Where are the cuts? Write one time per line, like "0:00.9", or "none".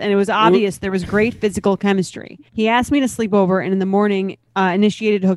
0:02.5